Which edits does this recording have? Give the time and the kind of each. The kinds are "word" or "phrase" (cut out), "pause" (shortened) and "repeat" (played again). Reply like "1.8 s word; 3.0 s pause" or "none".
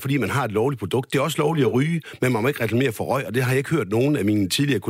none